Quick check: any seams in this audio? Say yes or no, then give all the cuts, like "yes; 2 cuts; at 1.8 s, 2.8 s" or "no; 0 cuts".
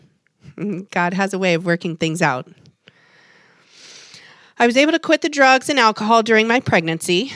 no; 0 cuts